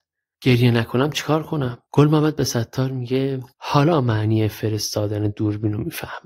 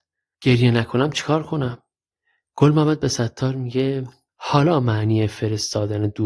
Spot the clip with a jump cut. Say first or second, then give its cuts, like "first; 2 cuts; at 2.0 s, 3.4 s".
first; 2 cuts; at 1.9 s, 3.5 s